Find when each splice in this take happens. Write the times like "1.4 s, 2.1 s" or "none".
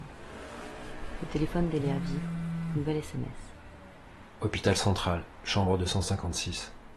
none

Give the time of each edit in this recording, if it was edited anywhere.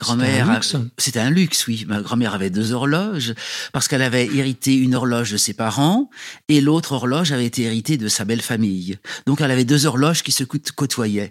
none

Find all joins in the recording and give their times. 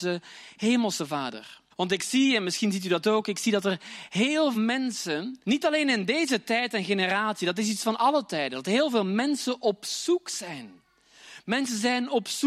1.7 s, 4.5 s, 5.4 s

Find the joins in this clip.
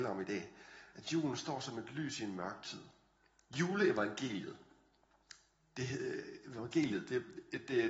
none

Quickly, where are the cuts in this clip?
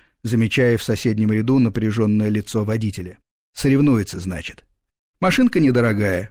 none

